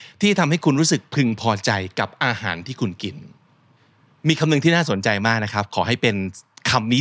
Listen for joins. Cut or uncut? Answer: uncut